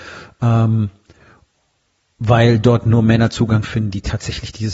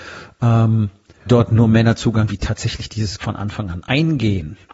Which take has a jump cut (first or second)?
second